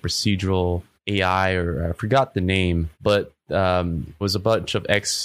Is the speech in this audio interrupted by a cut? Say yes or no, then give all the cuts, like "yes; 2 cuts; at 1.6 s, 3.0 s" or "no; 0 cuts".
yes; 3 cuts; at 0.9 s, 2.9 s, 4.2 s